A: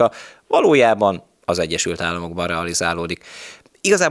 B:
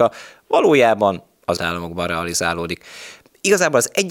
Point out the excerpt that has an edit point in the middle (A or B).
B